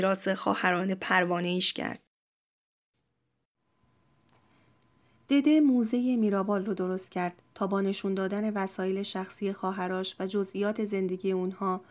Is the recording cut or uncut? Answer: uncut